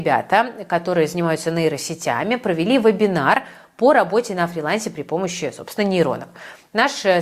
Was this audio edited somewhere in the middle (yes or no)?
no